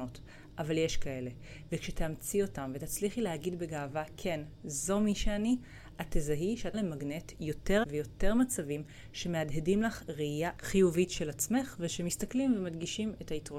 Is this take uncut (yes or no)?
no